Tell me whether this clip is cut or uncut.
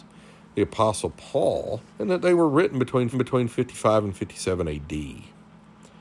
cut